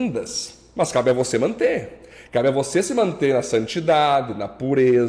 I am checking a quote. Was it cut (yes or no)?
no